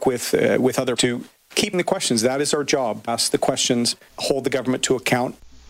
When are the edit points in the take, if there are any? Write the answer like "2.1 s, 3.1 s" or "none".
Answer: 1.0 s, 1.7 s, 3.1 s, 4.2 s